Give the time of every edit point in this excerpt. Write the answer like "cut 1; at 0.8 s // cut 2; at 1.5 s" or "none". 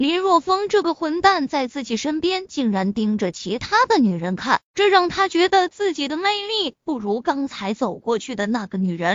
cut 1; at 4.7 s